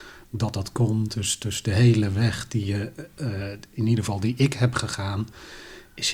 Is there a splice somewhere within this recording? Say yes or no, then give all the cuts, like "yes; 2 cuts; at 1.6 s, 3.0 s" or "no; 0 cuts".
no; 0 cuts